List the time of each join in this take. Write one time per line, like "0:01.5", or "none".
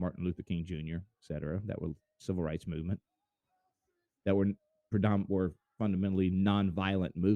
none